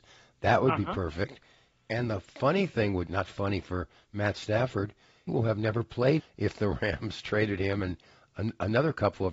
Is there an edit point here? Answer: yes; 2 cuts; at 5.3 s, 6.2 s

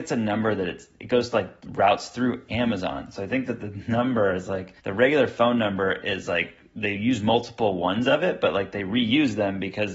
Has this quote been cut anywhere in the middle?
yes; 1 cut; at 4.8 s

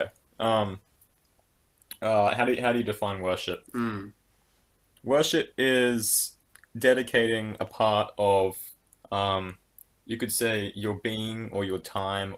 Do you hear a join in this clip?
no; 0 cuts

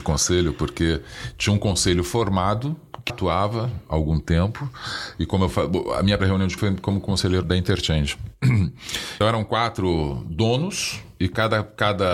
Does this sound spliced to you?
yes; 5 cuts; at 3.1 s, 6.2 s, 6.6 s, 7.4 s, 9.2 s

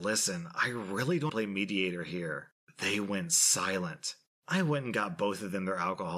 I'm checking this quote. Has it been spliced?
yes; 1 cut; at 1.3 s

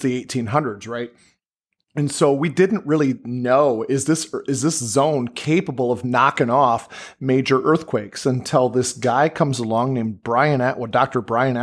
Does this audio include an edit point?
no; 0 cuts

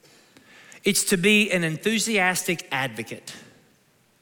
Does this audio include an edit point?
no; 0 cuts

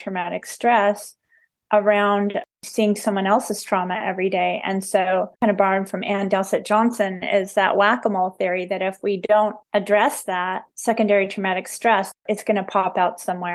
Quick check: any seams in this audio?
yes; 4 cuts; at 2.5 s, 5.3 s, 9.6 s, 10.7 s

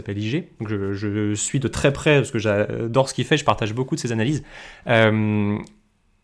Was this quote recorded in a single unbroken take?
yes; 0 cuts

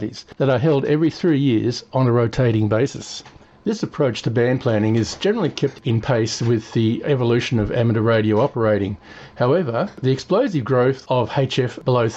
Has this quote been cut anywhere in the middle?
no; 0 cuts

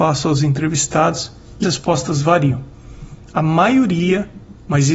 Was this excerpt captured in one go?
no; 1 cut; at 1.6 s

